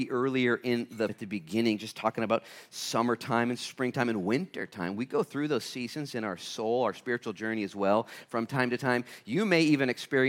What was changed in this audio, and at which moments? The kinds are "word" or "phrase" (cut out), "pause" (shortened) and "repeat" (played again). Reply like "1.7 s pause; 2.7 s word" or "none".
1.1 s phrase